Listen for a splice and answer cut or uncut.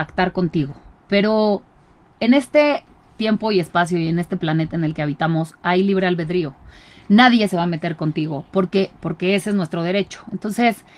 uncut